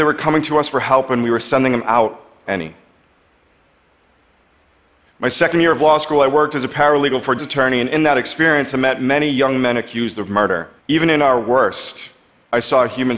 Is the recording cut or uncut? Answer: cut